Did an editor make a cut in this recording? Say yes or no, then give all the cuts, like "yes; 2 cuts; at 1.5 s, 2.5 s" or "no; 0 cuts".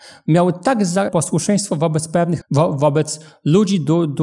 yes; 2 cuts; at 1.1 s, 2.4 s